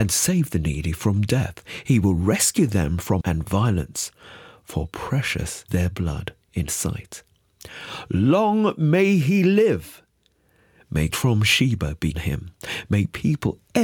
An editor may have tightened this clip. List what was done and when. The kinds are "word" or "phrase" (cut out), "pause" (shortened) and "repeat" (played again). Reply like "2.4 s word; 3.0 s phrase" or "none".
3.2 s word; 5.7 s word; 6.7 s word; 11.1 s word; 12.1 s word